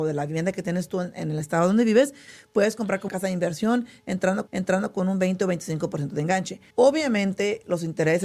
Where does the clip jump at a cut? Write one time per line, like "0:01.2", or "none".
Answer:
0:03.1
0:04.5
0:06.7

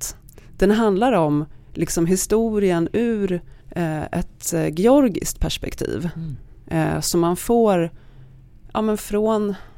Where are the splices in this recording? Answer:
0:03.6

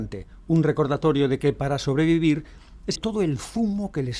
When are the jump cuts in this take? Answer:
0:03.0

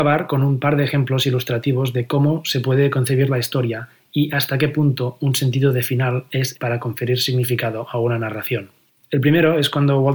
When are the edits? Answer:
0:06.5

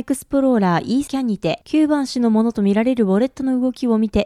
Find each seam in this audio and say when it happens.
0:01.1

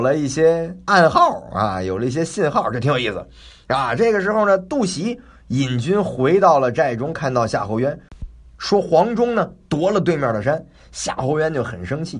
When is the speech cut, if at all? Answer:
none

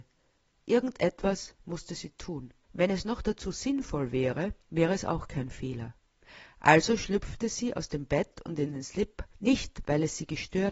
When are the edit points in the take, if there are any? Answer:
0:02.6
0:04.6
0:09.3

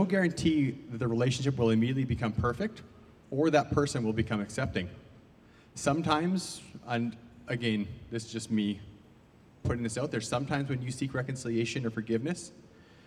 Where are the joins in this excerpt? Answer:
none

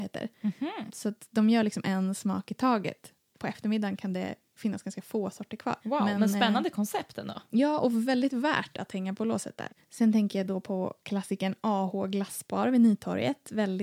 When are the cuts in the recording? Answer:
0:05.8
0:09.8

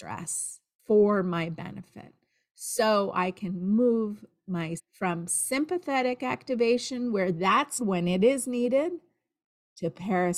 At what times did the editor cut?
0:04.8
0:07.8

